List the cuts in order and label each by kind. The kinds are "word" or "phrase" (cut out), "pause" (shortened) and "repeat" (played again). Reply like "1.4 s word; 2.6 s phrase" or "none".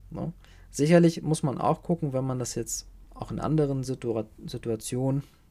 none

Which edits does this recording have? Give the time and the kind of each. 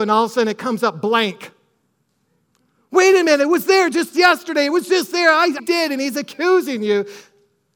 5.6 s phrase

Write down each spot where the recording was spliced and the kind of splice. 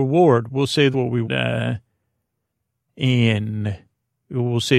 0.9 s word; 1.2 s word

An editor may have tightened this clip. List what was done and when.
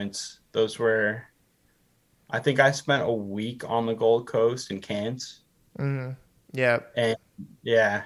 none

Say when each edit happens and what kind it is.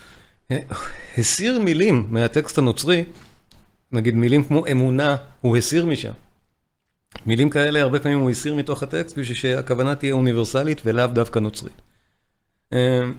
none

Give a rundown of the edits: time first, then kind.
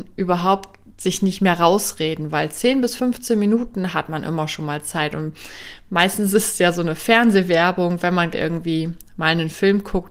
8.3 s word

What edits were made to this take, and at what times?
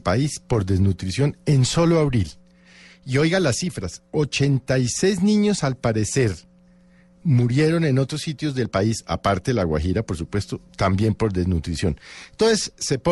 none

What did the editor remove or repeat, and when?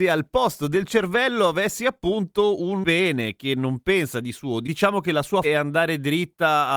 5.4 s word

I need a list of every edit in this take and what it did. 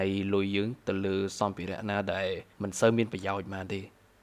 2.5 s pause

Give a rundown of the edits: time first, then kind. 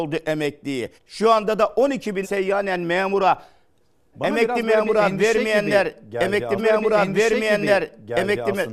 1.0 s pause; 2.2 s word; 4.1 s word; 6.6 s repeat

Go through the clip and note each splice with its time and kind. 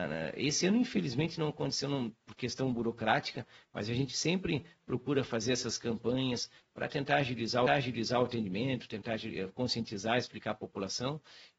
7.7 s repeat

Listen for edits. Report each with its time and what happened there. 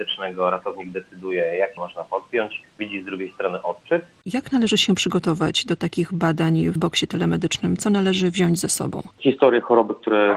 1.8 s word; 2.6 s word; 6.8 s word

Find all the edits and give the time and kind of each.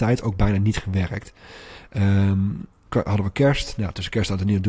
2.9 s word

